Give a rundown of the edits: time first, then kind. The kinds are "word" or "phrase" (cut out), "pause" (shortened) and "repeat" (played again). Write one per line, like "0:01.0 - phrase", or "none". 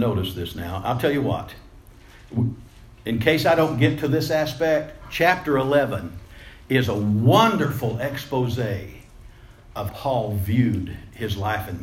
0:09.9 - word